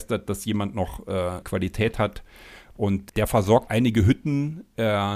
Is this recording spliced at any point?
yes; 3 cuts; at 1.4 s, 3.1 s, 3.7 s

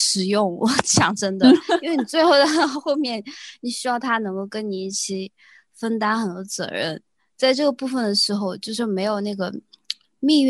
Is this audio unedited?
yes; 0 cuts

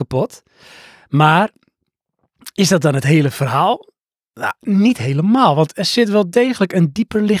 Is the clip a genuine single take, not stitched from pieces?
yes; 0 cuts

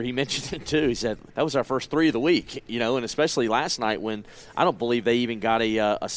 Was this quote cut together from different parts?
yes; 1 cut; at 1.3 s

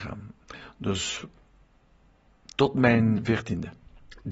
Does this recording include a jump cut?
no; 0 cuts

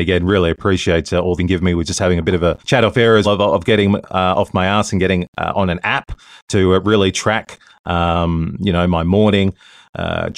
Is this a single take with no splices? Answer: no; 3 cuts; at 1.4 s, 2.6 s, 3.2 s

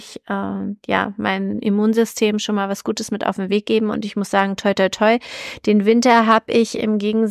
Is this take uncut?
yes; 0 cuts

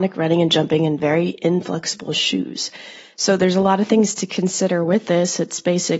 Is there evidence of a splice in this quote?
no; 0 cuts

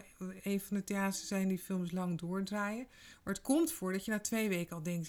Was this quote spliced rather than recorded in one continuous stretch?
no; 0 cuts

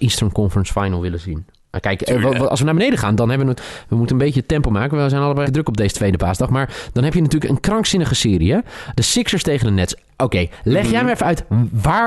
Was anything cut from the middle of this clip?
yes; 2 cuts; at 3.6 s, 5.4 s

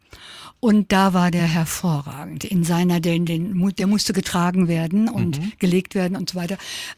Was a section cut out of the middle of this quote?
no; 0 cuts

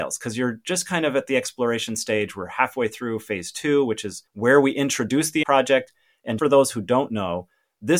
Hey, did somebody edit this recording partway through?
yes; 3 cuts; at 4.3 s, 5.4 s, 6.4 s

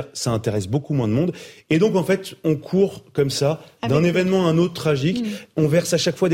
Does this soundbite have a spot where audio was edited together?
no; 0 cuts

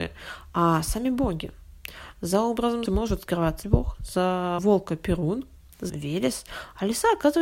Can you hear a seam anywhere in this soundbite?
yes; 4 cuts; at 2.9 s, 3.6 s, 4.6 s, 5.9 s

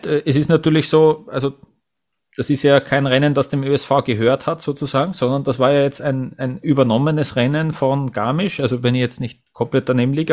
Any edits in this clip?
no; 0 cuts

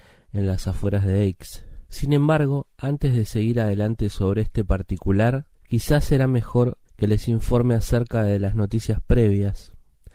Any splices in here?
yes; 3 cuts; at 1.9 s, 5.5 s, 6.8 s

